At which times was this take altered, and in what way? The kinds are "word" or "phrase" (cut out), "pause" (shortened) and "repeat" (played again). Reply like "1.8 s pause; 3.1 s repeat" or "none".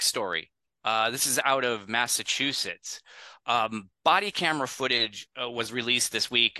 4.0 s pause